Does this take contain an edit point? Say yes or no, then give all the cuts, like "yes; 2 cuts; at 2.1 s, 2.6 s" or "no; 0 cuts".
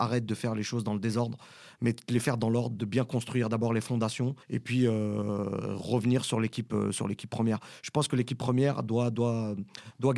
yes; 1 cut; at 4.4 s